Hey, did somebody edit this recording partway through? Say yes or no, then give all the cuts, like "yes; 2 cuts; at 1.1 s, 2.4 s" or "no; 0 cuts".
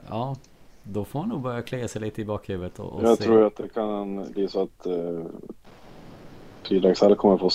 yes; 1 cut; at 4.3 s